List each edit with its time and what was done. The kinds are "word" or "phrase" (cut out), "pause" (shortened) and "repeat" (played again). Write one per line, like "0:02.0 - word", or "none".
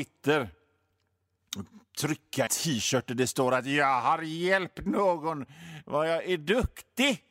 0:02.5 - word